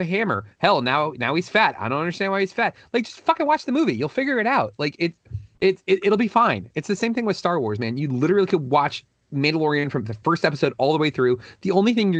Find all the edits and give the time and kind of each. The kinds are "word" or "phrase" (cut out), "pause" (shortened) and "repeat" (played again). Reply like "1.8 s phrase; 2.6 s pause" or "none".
5.5 s pause